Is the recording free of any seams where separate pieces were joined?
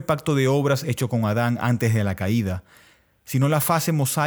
yes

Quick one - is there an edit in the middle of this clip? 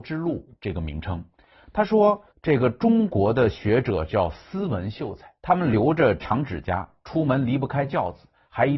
yes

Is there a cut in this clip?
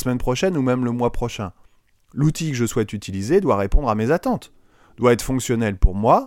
no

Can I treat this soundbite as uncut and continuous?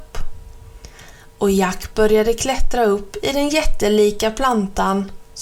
yes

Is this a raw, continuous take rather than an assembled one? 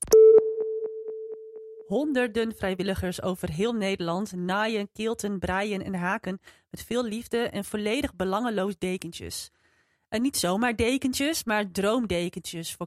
yes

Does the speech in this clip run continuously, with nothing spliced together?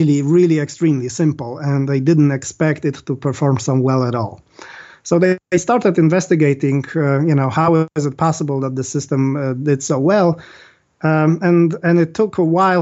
yes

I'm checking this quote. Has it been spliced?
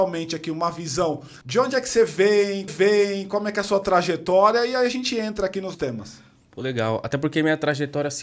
yes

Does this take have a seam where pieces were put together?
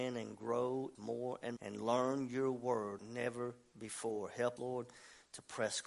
yes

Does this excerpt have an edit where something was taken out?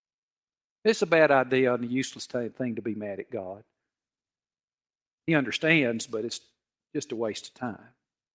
no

